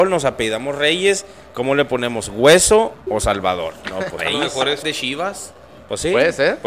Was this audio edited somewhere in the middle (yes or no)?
yes